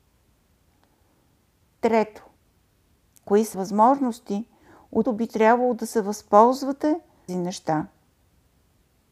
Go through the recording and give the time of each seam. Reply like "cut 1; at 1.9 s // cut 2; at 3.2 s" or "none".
cut 1; at 3.5 s // cut 2; at 5.0 s // cut 3; at 7.3 s